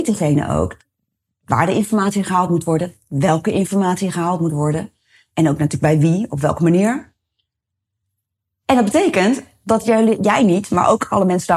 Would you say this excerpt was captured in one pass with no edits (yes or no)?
yes